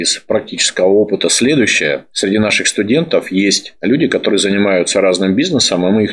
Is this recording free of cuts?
yes; 0 cuts

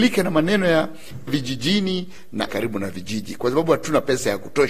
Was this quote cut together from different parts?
yes; 2 cuts; at 1.3 s, 2.5 s

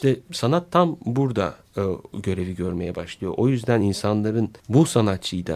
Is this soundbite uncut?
no; 1 cut; at 4.6 s

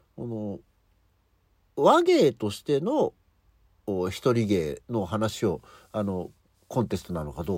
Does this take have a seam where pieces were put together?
no; 0 cuts

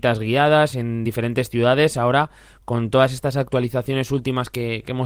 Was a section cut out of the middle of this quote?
no; 0 cuts

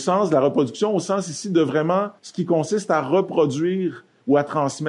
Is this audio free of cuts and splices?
no; 1 cut; at 2.2 s

